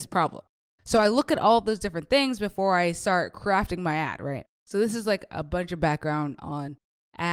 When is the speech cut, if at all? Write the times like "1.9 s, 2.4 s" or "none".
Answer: 4.5 s